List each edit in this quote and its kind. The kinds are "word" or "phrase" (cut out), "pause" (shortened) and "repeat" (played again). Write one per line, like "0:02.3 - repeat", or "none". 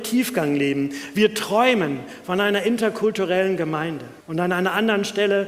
0:04.2 - pause